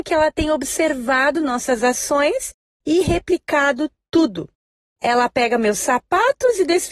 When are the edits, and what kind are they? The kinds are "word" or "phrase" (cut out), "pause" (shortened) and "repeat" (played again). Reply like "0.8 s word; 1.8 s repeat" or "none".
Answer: none